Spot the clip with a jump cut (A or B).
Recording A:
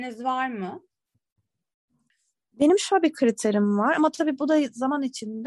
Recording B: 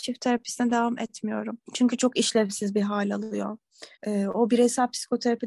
B